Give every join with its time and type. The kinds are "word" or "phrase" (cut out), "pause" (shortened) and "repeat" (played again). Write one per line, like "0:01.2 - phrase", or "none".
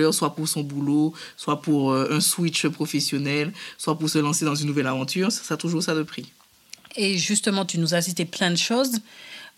none